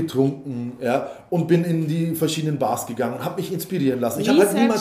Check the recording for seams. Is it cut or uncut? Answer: uncut